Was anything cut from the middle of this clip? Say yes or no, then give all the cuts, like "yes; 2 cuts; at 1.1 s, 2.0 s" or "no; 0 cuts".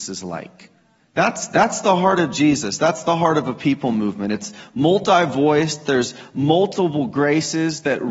yes; 1 cut; at 1.0 s